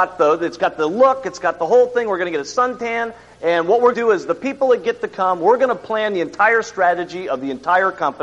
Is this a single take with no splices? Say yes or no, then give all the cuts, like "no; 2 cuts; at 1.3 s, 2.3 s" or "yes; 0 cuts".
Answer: no; 1 cut; at 3.9 s